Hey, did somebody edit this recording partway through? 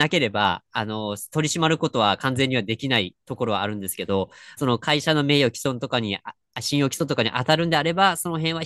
yes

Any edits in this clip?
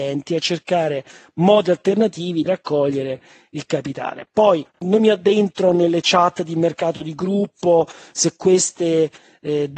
yes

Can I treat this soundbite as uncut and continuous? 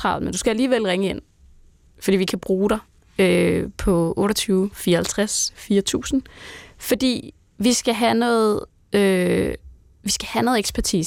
yes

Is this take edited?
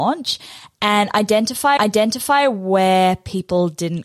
yes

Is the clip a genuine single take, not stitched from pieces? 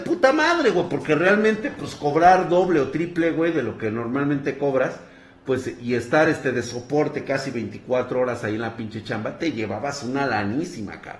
yes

